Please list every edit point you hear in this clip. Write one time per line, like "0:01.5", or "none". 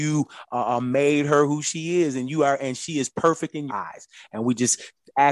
0:03.7